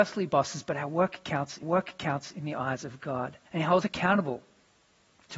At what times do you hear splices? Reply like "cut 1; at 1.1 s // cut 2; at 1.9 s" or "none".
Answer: cut 1; at 1.6 s // cut 2; at 3.5 s // cut 3; at 3.8 s